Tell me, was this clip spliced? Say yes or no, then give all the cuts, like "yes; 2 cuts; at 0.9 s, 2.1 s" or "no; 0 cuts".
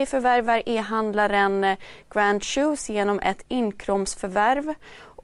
no; 0 cuts